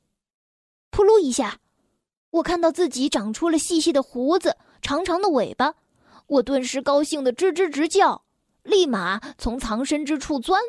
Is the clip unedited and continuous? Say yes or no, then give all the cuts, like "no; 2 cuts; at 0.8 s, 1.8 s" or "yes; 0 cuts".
yes; 0 cuts